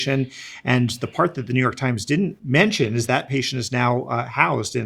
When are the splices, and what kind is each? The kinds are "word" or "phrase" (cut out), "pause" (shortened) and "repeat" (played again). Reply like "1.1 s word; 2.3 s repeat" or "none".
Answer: 2.4 s word; 3.1 s word

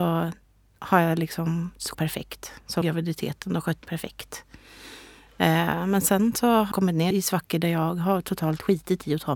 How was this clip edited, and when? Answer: 1.9 s phrase; 2.8 s word; 3.8 s phrase; 6.7 s word; 7.1 s word

